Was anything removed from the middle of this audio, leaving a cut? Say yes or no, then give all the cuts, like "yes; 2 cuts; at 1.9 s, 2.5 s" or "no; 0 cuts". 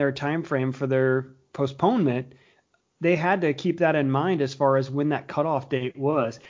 no; 0 cuts